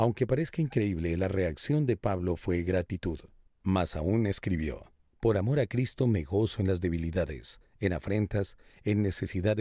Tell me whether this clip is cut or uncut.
uncut